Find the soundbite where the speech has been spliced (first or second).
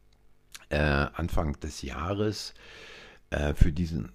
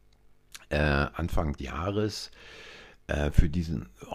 second